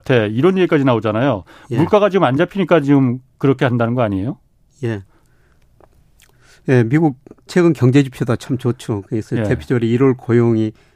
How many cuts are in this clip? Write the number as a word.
zero